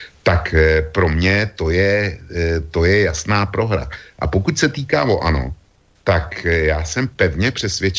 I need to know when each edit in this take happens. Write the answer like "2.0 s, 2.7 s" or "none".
none

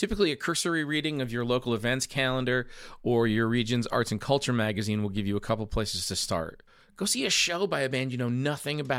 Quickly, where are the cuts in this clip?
6.7 s

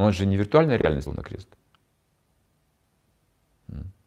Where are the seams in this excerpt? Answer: 1.1 s

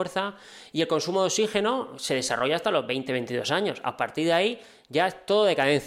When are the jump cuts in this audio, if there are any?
none

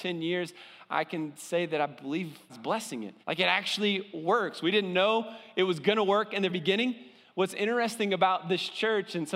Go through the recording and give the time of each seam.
2.5 s, 3.2 s, 6.5 s

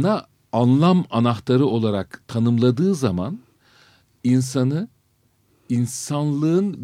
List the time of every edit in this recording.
none

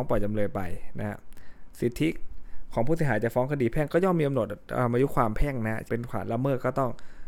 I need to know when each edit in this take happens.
5.9 s

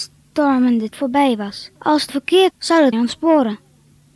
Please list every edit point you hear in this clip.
0.9 s, 1.8 s, 2.1 s, 2.5 s, 2.9 s

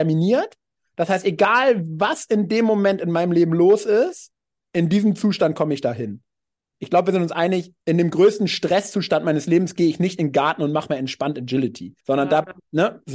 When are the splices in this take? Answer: 7.8 s, 12.0 s

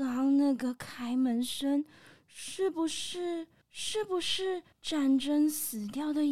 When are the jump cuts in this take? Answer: 3.6 s, 4.7 s

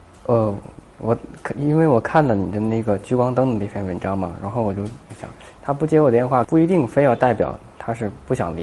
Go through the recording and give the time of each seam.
none

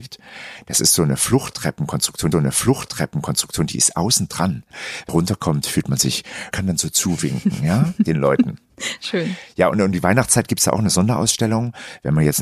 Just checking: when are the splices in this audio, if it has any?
2.3 s, 5.1 s, 6.5 s

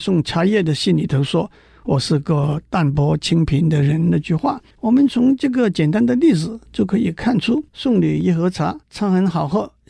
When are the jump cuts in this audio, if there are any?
4.7 s, 6.7 s, 7.7 s, 8.8 s

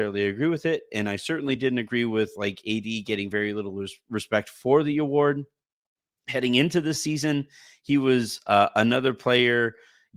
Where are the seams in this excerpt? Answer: none

